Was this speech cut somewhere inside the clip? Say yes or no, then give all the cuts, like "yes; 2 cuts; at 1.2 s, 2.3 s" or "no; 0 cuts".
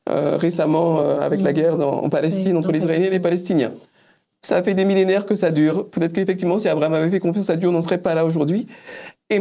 no; 0 cuts